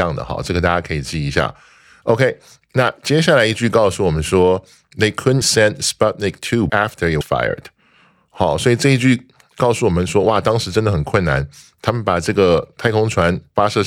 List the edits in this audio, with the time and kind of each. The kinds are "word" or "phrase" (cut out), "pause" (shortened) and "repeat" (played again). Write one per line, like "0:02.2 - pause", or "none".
0:05.4 - word
0:06.7 - word
0:07.2 - word